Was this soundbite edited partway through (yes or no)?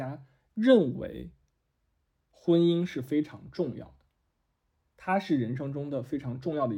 no